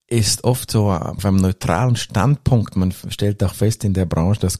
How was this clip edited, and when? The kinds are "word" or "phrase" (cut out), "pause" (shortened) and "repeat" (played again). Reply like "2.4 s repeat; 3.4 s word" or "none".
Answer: 1.2 s word